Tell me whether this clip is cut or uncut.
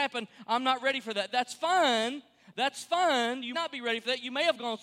cut